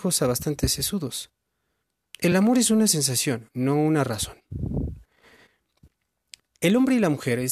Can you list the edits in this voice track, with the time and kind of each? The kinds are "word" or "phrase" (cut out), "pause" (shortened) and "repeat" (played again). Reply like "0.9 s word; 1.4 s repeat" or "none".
none

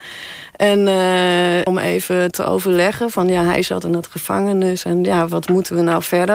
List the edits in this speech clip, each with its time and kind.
1.7 s word; 5.3 s word

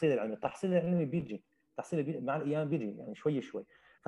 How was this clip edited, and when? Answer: none

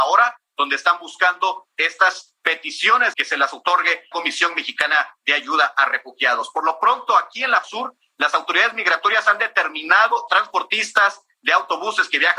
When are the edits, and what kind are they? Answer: 3.1 s phrase; 4.1 s word; 7.6 s word; 10.3 s phrase

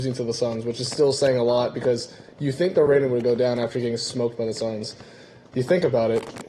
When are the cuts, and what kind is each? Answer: none

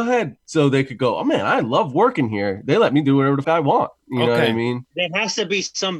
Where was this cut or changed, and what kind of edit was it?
3.4 s word

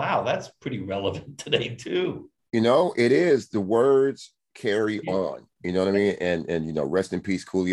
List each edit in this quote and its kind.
none

